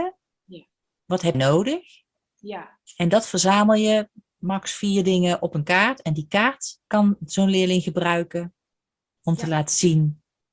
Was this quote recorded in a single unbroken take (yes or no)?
no